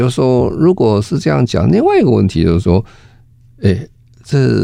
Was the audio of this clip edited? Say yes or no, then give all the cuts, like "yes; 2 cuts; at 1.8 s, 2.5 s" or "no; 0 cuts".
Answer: no; 0 cuts